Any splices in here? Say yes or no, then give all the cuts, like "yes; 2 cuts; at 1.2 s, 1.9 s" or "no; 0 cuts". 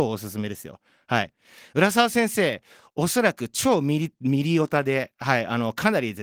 no; 0 cuts